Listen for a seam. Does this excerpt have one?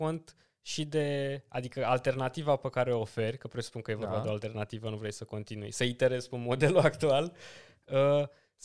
no; 0 cuts

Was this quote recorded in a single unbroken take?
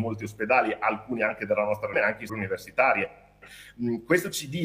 no; 2 cuts; at 1.9 s, 2.3 s

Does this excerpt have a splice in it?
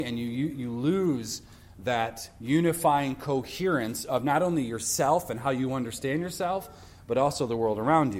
no; 0 cuts

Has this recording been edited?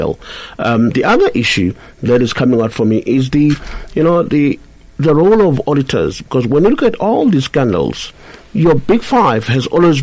no; 0 cuts

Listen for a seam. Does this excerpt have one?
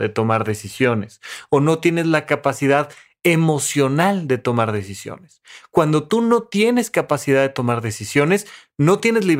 no; 0 cuts

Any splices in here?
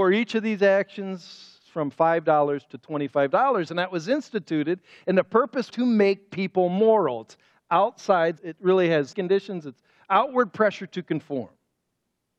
yes; 4 cuts; at 1.6 s, 5.7 s, 8.4 s, 9.1 s

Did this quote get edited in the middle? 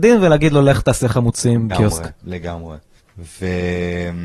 yes; 2 cuts; at 1.7 s, 3.0 s

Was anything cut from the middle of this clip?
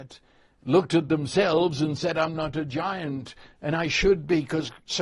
no; 0 cuts

